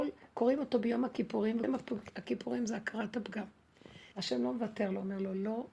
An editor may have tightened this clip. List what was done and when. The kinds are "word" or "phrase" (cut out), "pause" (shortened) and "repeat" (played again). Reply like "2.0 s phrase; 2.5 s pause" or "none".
1.6 s word; 4.1 s pause